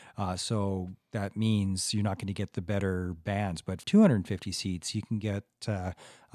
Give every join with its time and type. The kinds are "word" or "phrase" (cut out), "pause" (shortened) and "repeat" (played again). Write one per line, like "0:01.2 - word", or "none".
0:03.8 - word

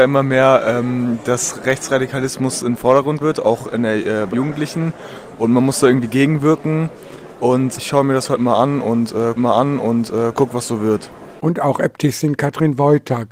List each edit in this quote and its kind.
0:03.2 - word
0:04.3 - word
0:07.8 - word
0:09.4 - repeat

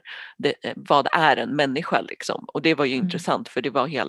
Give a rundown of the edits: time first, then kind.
none

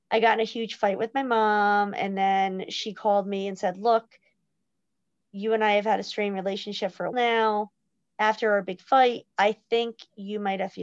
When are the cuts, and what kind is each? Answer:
0:07.1 - word
0:09.3 - pause

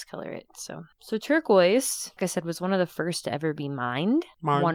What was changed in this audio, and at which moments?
0:00.9 - pause
0:03.2 - word

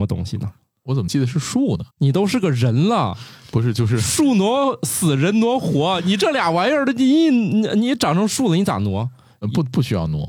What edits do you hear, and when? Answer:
0:01.9 - pause

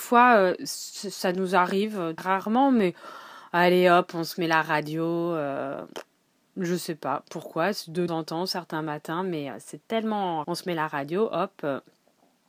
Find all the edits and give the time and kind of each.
0:02.2 - word
0:08.1 - word
0:10.4 - word

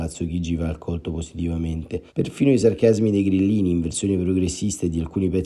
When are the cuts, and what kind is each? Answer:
0:02.1 - pause

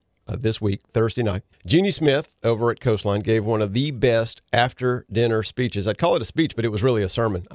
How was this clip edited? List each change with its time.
0:01.5 - pause

